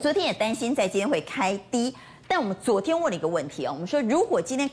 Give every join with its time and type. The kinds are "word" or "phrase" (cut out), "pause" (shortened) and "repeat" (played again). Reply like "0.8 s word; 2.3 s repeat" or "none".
none